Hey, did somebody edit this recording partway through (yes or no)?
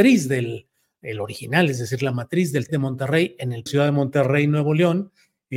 yes